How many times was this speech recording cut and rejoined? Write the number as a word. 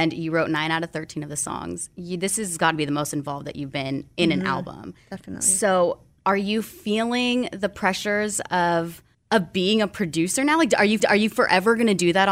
two